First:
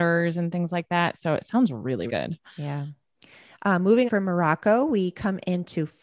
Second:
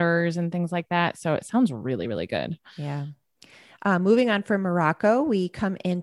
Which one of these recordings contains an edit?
first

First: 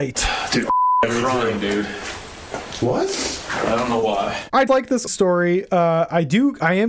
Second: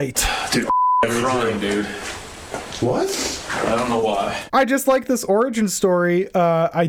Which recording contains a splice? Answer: first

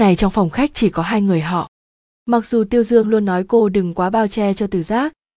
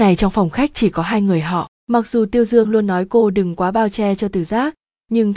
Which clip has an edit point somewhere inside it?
second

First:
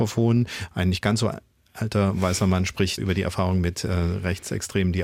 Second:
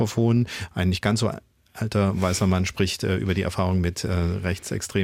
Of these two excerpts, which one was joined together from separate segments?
first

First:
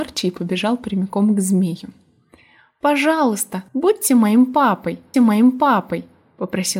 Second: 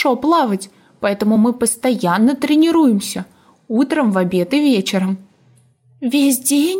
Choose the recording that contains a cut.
first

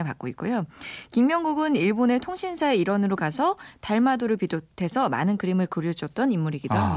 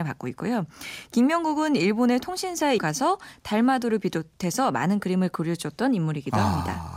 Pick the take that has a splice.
second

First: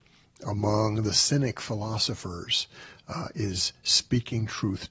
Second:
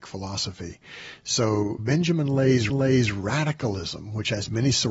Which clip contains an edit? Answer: second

